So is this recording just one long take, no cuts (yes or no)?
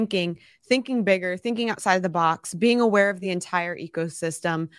yes